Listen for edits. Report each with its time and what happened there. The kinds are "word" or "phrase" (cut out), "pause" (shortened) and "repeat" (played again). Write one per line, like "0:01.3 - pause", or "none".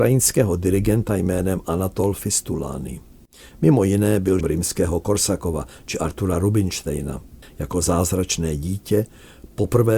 0:04.4 - word